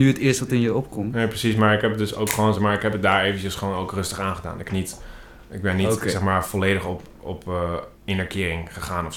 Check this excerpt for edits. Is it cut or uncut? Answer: cut